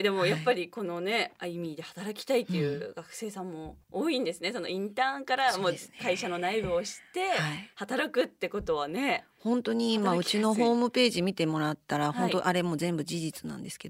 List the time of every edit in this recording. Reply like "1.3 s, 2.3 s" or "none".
3.8 s